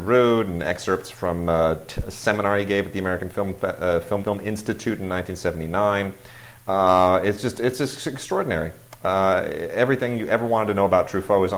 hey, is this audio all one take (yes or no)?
no